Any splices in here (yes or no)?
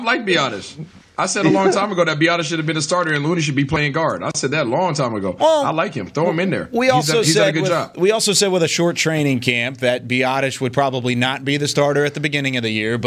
no